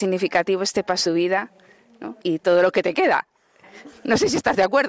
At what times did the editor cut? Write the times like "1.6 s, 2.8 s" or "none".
1.1 s, 2.2 s